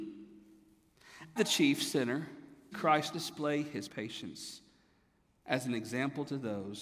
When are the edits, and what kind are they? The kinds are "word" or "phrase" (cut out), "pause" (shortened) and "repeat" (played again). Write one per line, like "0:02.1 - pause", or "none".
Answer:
0:01.4 - word
0:02.7 - word
0:03.1 - word
0:03.9 - word